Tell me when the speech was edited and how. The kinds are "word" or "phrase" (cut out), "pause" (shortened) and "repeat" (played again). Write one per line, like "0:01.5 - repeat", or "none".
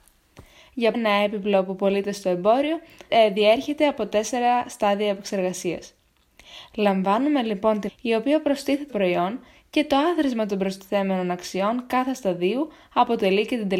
0:00.9 - word
0:03.1 - word
0:07.9 - phrase
0:08.9 - word